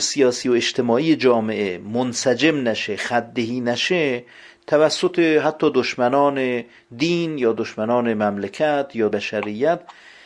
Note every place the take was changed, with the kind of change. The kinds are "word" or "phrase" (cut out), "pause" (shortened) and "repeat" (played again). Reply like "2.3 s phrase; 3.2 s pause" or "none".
9.1 s word